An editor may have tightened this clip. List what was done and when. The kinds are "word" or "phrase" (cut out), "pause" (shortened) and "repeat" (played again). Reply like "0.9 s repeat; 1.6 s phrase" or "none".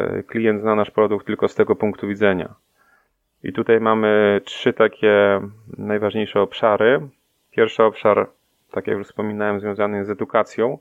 none